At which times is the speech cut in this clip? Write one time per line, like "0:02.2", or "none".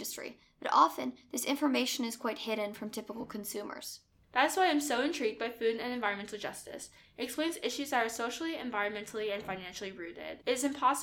none